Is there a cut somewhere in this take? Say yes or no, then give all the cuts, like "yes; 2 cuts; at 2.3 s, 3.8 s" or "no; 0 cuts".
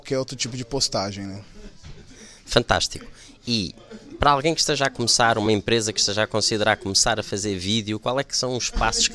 no; 0 cuts